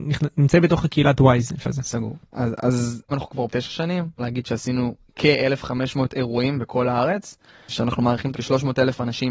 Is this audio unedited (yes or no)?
no